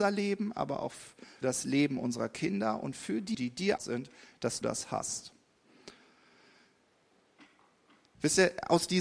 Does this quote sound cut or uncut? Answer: cut